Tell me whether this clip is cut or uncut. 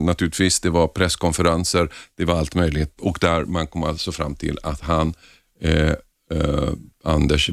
cut